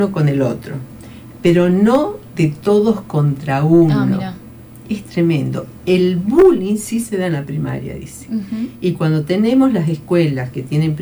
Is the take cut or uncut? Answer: uncut